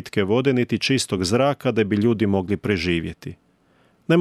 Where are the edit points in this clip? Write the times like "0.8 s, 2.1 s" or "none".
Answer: none